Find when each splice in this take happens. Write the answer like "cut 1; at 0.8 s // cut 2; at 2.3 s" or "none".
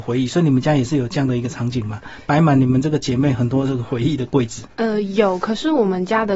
cut 1; at 4.7 s